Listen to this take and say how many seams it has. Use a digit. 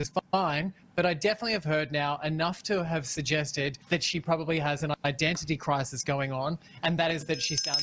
1